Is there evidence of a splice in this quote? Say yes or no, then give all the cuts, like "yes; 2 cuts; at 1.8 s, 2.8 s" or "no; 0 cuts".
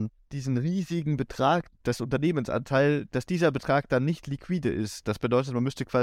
no; 0 cuts